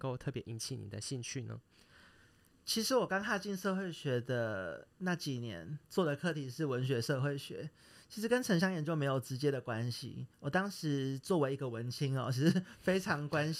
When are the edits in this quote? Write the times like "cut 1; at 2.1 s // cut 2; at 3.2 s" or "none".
cut 1; at 10.3 s